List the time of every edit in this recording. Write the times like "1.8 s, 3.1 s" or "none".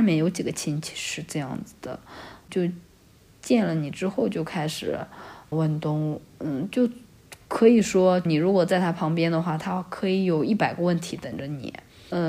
none